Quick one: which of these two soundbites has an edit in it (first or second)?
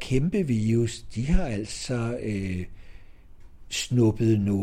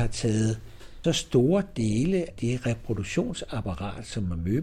second